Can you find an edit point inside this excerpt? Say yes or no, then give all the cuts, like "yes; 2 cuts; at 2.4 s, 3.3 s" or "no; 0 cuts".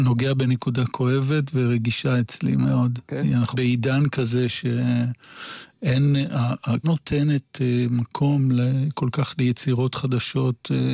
yes; 3 cuts; at 3.0 s, 3.5 s, 6.8 s